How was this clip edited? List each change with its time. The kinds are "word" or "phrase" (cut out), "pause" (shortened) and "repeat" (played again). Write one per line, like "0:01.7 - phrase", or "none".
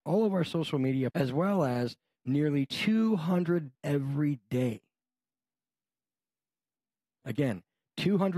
0:01.1 - word
0:03.7 - word